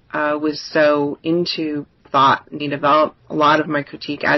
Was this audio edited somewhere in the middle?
yes; 3 cuts; at 2.0 s, 2.6 s, 3.2 s

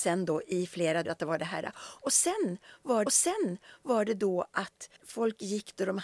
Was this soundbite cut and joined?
yes; 3 cuts; at 1.0 s, 3.1 s, 5.0 s

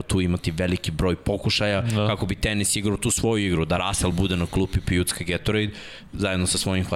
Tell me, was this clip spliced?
no; 0 cuts

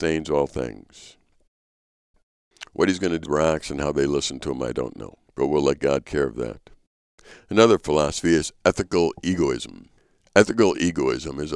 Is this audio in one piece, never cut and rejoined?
no; 4 cuts; at 3.2 s, 5.3 s, 6.0 s, 10.0 s

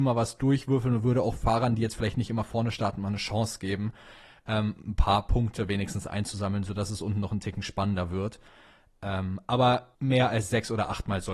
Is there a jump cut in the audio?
yes; 1 cut; at 9.9 s

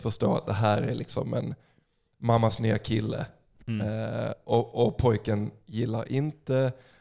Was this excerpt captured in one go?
yes; 0 cuts

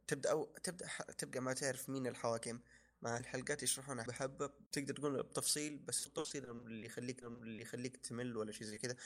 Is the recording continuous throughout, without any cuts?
no; 6 cuts; at 1.3 s, 3.2 s, 4.1 s, 4.7 s, 6.1 s, 7.2 s

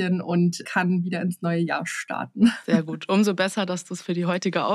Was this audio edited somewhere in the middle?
no; 0 cuts

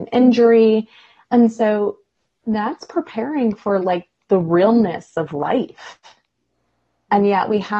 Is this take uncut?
yes; 0 cuts

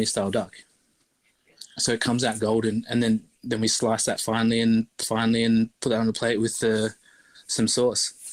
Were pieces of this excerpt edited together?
yes; 2 cuts; at 3.4 s, 5.0 s

